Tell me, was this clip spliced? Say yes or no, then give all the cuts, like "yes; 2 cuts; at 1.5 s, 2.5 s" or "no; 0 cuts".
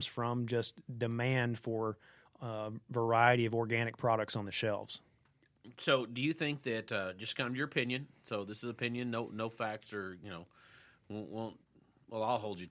no; 0 cuts